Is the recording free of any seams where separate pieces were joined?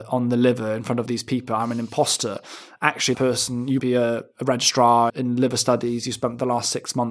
no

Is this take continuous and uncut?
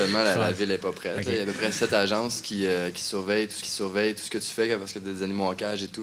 no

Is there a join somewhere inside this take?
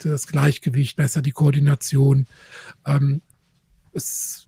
yes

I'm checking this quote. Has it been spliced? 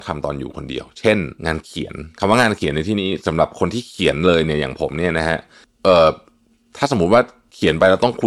yes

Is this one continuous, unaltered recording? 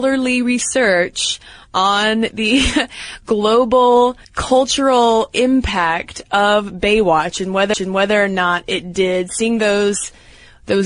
no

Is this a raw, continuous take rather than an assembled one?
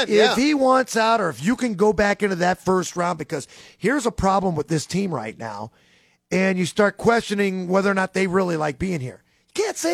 yes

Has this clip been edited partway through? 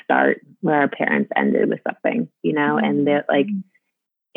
no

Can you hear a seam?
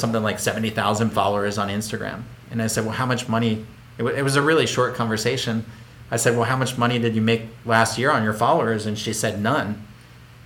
no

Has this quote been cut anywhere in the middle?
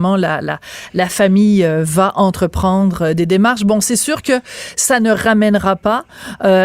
no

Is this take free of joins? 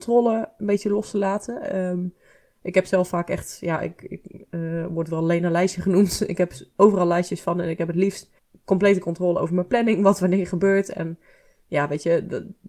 no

